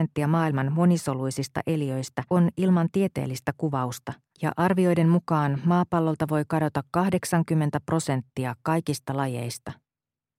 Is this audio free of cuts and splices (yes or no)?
no